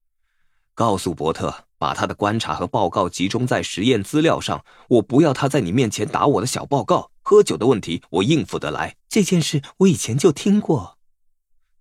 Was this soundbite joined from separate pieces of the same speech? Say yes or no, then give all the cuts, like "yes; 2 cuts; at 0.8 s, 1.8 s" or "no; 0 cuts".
yes; 3 cuts; at 1.7 s, 7.2 s, 9.0 s